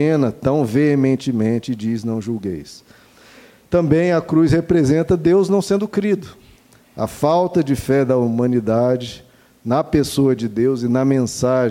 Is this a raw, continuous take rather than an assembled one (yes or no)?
yes